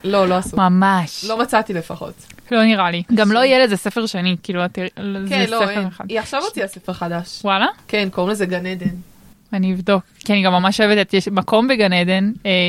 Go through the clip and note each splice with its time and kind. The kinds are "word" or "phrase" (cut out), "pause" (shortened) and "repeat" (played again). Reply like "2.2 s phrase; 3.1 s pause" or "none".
none